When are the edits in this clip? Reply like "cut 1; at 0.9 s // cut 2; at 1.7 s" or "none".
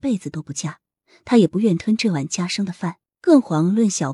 cut 1; at 3.1 s